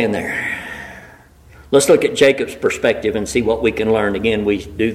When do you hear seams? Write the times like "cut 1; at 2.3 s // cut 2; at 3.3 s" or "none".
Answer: none